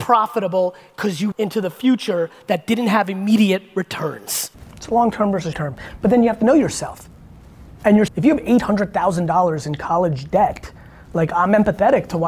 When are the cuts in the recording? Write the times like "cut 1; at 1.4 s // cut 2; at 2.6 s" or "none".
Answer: cut 1; at 1.3 s // cut 2; at 5.5 s // cut 3; at 8.1 s